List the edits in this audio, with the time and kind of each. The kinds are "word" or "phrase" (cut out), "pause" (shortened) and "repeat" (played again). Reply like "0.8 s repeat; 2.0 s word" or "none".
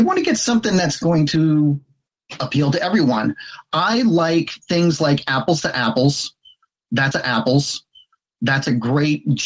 4.6 s pause; 7.1 s repeat